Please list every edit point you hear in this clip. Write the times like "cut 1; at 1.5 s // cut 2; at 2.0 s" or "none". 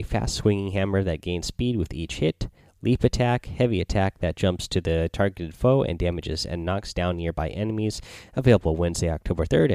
none